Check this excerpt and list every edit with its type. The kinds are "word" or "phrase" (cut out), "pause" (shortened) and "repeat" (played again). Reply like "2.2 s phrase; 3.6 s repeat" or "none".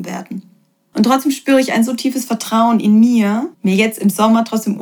3.5 s pause